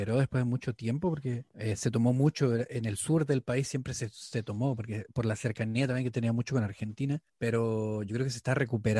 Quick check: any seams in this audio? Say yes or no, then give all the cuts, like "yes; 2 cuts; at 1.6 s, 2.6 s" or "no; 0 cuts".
yes; 2 cuts; at 1.5 s, 7.3 s